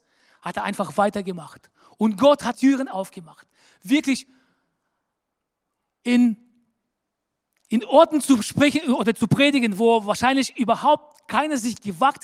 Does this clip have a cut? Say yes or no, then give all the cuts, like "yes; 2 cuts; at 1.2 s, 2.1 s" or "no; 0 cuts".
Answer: yes; 1 cut; at 2.5 s